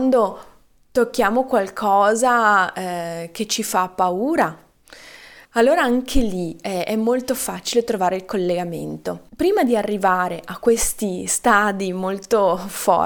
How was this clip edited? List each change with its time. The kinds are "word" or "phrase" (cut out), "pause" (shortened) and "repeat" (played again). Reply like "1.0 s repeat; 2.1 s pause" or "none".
5.4 s pause

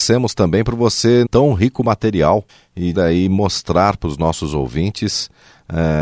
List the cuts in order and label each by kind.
1.3 s phrase; 2.5 s pause; 2.9 s phrase

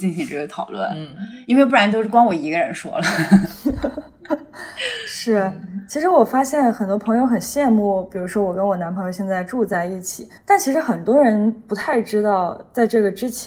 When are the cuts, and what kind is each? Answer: 10.4 s pause

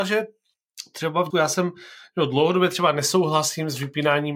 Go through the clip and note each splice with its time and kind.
1.3 s word

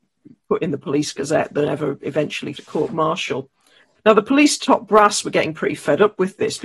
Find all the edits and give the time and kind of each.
2.5 s word

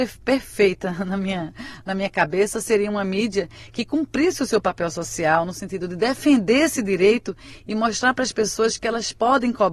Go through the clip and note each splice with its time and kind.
none

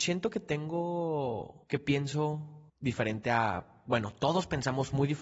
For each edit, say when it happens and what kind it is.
1.6 s pause; 2.7 s pause

